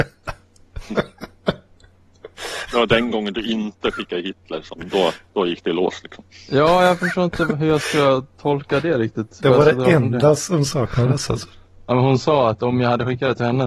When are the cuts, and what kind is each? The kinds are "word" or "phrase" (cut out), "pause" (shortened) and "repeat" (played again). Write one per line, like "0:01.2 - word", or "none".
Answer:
none